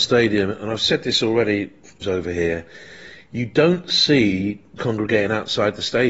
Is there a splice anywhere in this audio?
yes; 2 cuts; at 2.0 s, 4.8 s

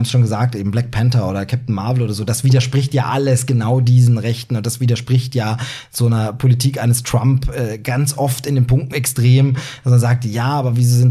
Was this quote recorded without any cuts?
no; 1 cut; at 8.9 s

